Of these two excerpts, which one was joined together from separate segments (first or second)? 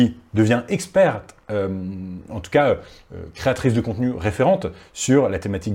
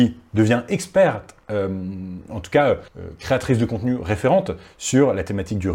second